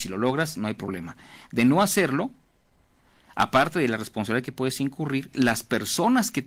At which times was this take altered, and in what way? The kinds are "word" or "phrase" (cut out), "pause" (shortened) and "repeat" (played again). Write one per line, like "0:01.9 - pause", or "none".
none